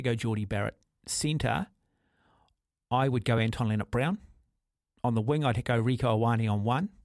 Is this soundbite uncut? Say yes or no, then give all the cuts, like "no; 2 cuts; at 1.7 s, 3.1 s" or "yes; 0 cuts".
yes; 0 cuts